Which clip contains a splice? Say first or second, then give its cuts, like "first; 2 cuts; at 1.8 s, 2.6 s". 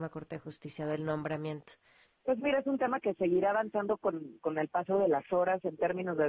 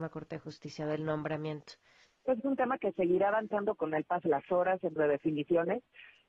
second; 4 cuts; at 2.4 s, 3.8 s, 4.3 s, 5.0 s